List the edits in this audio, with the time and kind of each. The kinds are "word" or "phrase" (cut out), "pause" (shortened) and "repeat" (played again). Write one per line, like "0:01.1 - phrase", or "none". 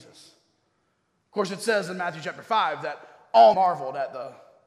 0:03.5 - word